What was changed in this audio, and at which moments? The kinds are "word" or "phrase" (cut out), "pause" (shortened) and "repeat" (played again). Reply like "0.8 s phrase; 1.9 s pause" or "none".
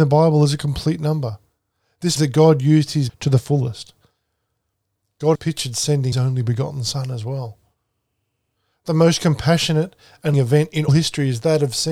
2.2 s word; 3.1 s word; 5.3 s word; 6.1 s word; 10.3 s word; 10.9 s word